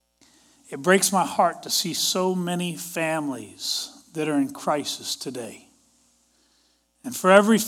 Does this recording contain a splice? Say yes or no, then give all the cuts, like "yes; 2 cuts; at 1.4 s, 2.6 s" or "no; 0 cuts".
no; 0 cuts